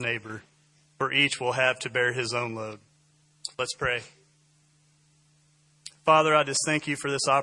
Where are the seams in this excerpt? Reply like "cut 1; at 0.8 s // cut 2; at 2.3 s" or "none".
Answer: cut 1; at 3.5 s